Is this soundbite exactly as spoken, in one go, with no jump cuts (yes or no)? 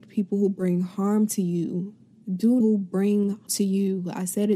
no